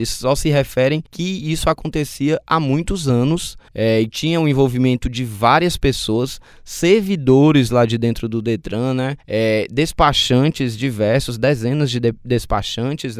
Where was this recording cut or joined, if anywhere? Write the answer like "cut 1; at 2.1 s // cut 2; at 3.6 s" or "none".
cut 1; at 1.1 s // cut 2; at 3.7 s // cut 3; at 9.2 s

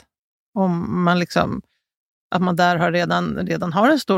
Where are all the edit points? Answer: none

